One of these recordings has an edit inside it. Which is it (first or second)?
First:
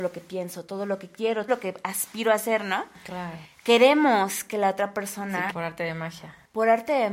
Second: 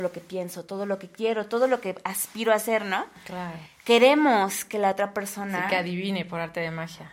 first